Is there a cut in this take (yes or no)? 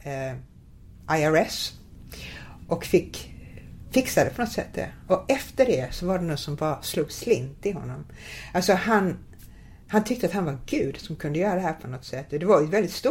yes